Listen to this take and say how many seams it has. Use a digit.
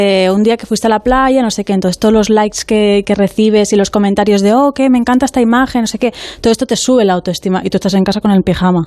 0